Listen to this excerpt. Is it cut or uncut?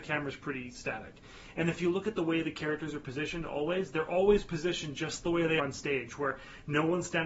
cut